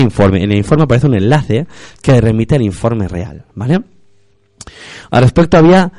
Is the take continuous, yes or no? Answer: yes